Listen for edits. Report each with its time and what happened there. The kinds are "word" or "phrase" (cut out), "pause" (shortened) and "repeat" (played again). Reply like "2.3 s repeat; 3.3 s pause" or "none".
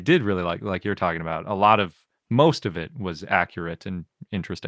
none